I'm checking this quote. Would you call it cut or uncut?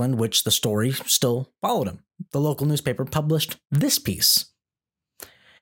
uncut